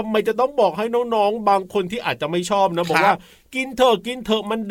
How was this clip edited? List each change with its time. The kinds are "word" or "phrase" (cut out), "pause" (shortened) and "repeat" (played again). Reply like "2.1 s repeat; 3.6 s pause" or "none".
none